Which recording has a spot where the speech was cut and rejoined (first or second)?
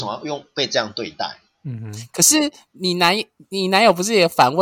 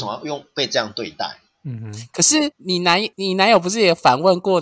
second